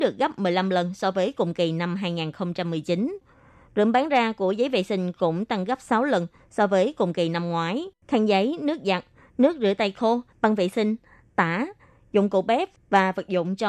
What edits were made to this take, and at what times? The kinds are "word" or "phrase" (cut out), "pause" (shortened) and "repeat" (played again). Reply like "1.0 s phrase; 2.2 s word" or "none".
8.0 s pause; 10.3 s pause